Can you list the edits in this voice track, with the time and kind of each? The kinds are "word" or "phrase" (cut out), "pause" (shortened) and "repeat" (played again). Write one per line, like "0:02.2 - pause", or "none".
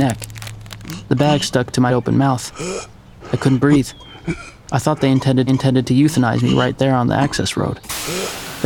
0:01.9 - word
0:05.5 - repeat